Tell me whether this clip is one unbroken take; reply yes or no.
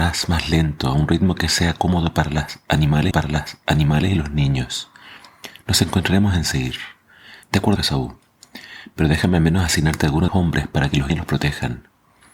no